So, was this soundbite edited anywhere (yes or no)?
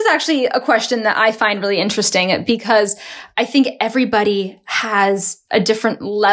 no